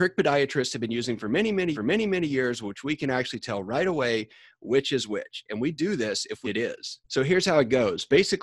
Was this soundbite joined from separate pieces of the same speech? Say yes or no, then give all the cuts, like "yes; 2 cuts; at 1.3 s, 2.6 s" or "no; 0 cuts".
yes; 2 cuts; at 1.7 s, 6.4 s